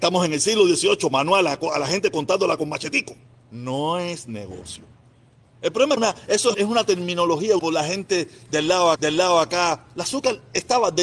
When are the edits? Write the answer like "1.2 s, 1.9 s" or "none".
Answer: 3.2 s, 6.0 s, 6.5 s, 7.6 s, 9.0 s